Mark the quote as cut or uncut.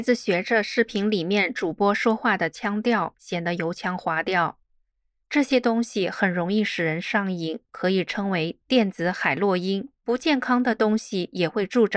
cut